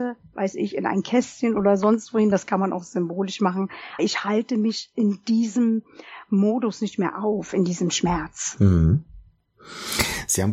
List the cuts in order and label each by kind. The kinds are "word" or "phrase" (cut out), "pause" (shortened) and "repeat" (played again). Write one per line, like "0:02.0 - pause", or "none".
0:04.0 - word